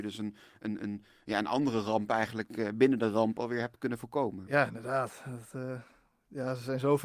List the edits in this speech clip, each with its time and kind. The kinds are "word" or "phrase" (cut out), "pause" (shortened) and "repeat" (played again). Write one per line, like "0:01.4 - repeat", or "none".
none

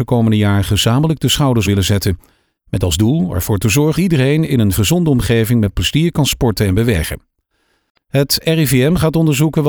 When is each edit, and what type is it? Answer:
0:01.6 - word
0:03.9 - word
0:04.7 - word

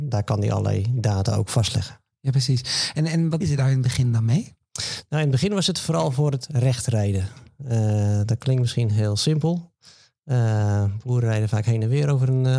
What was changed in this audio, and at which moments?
0:03.4 - word

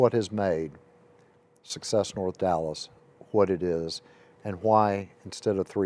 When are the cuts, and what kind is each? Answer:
none

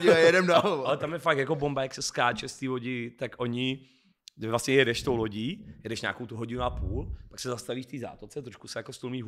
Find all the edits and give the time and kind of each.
none

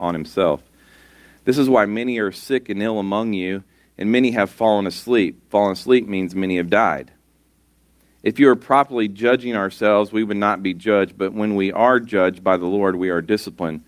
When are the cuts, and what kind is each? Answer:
none

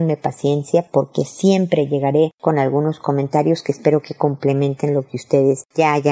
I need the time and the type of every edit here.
none

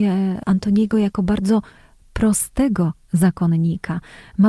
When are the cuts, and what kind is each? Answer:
none

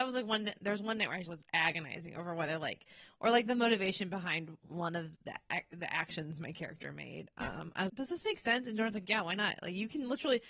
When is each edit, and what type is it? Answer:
0:01.3 - word
0:05.1 - word
0:07.9 - word

